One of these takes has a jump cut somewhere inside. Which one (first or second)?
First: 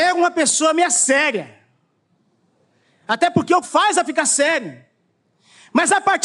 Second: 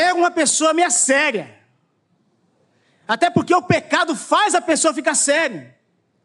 first